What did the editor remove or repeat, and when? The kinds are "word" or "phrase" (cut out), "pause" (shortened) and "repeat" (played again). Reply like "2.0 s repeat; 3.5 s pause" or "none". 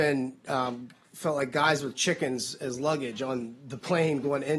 none

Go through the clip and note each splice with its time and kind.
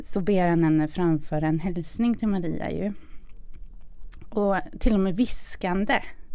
none

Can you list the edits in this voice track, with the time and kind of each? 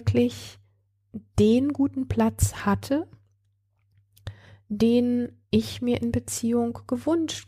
5.4 s pause

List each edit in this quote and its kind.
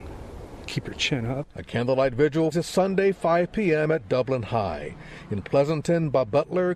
2.5 s phrase

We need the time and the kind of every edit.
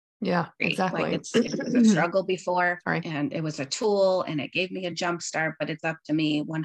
none

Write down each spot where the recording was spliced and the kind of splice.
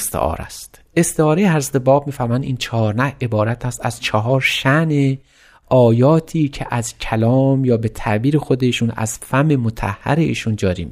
none

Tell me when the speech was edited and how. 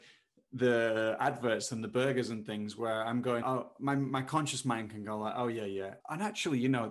3.4 s word; 6.0 s pause

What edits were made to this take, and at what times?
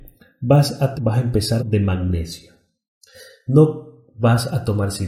0.9 s word; 1.6 s phrase

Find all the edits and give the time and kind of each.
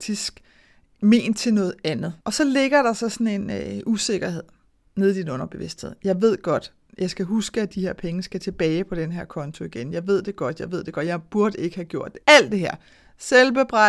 2.2 s pause; 12.2 s pause

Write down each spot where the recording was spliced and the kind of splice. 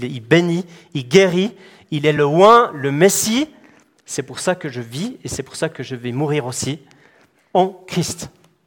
none

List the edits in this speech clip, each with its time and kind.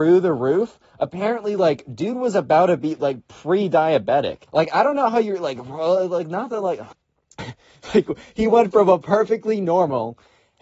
4.5 s pause; 6.9 s pause

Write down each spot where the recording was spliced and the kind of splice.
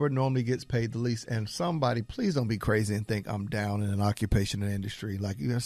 none

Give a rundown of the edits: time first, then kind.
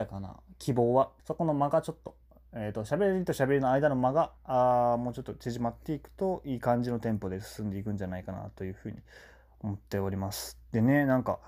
1.2 s pause; 4.4 s pause

